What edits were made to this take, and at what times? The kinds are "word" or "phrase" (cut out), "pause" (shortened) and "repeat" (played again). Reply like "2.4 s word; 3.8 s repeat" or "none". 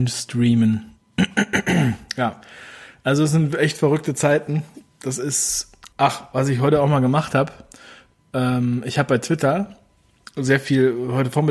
5.9 s pause